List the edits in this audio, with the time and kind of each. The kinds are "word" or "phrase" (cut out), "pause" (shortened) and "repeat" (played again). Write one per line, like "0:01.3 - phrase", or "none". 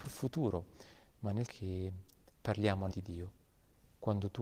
0:01.5 - word
0:02.9 - word